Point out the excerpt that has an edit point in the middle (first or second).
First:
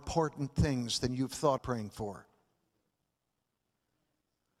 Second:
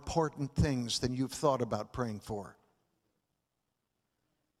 first